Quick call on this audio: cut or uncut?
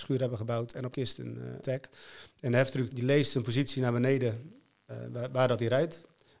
cut